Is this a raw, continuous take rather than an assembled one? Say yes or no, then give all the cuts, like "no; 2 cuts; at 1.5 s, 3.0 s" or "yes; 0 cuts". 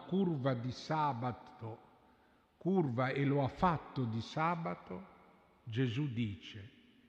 yes; 0 cuts